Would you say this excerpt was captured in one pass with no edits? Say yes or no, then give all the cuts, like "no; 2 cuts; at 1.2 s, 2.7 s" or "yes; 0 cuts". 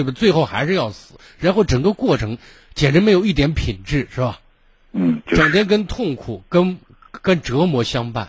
yes; 0 cuts